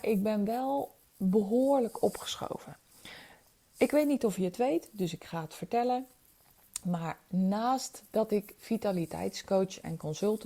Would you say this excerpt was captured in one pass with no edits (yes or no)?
yes